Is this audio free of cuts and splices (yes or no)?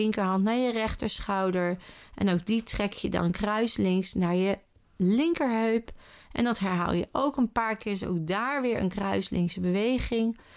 yes